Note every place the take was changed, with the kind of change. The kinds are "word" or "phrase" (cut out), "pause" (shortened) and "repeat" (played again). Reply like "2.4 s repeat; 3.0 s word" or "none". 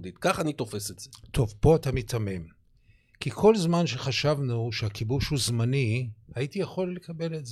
none